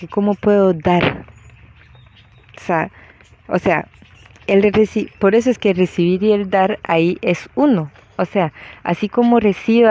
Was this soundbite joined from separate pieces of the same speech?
no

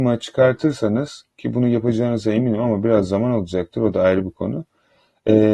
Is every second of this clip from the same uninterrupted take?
no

